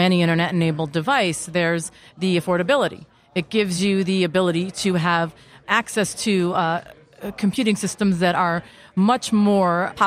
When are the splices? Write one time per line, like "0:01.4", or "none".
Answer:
none